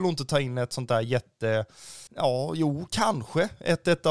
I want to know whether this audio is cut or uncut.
cut